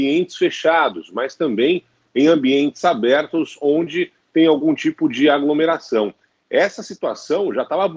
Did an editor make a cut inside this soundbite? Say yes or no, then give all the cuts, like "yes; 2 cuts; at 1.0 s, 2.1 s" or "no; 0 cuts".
no; 0 cuts